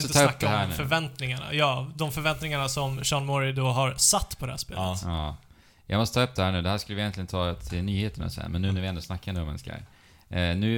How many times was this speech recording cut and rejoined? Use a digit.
0